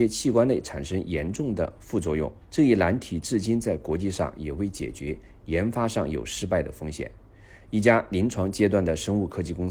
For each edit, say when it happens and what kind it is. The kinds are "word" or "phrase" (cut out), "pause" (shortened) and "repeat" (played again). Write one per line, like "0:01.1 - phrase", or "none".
0:02.4 - pause